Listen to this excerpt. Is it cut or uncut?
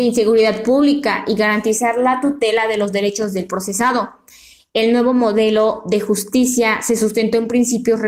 uncut